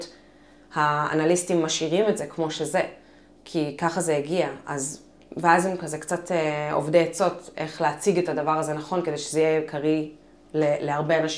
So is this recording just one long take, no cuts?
yes; 0 cuts

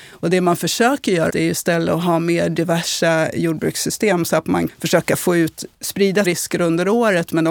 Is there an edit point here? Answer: yes; 3 cuts; at 1.3 s, 4.7 s, 6.2 s

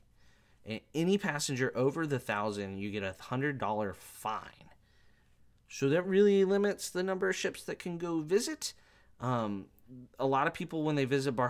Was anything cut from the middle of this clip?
no; 0 cuts

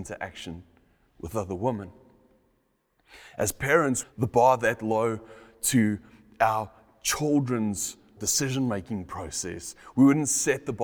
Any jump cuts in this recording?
yes; 2 cuts; at 4.0 s, 8.2 s

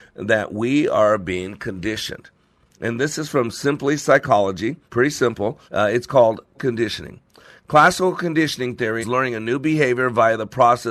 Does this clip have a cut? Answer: yes; 4 cuts; at 4.9 s, 5.7 s, 6.5 s, 9.0 s

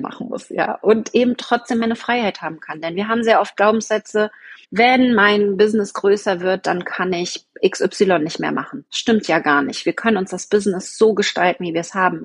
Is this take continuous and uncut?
no; 1 cut; at 4.6 s

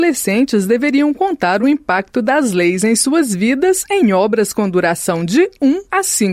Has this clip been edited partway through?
no; 0 cuts

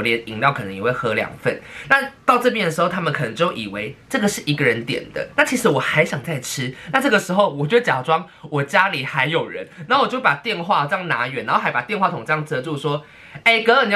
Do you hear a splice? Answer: no; 0 cuts

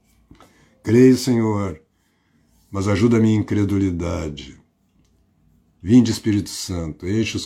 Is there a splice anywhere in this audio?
no; 0 cuts

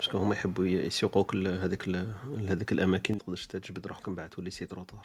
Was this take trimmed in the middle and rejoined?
yes; 1 cut; at 3.2 s

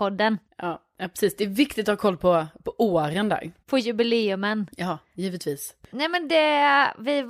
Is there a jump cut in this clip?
yes; 1 cut; at 3.6 s

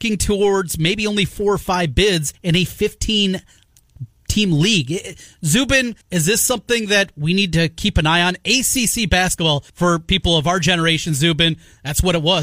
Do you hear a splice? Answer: yes; 3 cuts; at 2.3 s, 6.0 s, 9.7 s

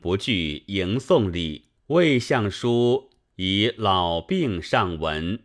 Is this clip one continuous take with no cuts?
no; 1 cut; at 1.8 s

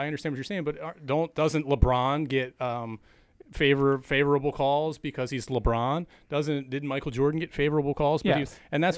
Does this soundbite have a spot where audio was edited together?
no; 0 cuts

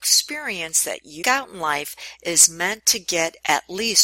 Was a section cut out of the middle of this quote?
yes; 1 cut; at 1.2 s

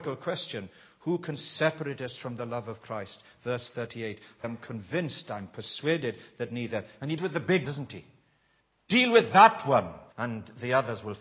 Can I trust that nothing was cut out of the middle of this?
no; 4 cuts; at 4.4 s, 7.2 s, 7.6 s, 10.1 s

